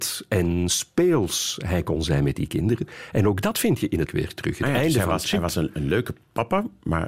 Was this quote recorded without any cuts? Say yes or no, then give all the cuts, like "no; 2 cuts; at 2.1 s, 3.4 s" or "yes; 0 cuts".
no; 1 cut; at 4.1 s